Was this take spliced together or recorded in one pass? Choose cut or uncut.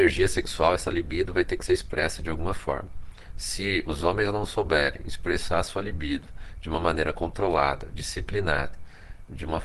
uncut